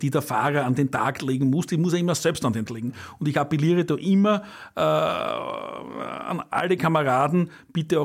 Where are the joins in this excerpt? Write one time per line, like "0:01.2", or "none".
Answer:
0:02.7